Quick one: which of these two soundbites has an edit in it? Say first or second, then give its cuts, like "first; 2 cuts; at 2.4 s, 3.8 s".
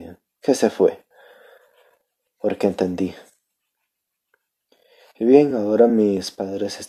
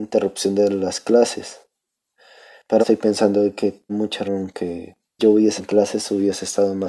second; 5 cuts; at 2.8 s, 3.9 s, 4.3 s, 5.2 s, 5.6 s